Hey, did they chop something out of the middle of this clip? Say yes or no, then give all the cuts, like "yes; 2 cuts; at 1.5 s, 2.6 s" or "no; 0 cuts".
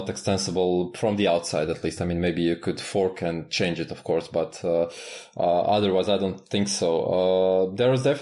no; 0 cuts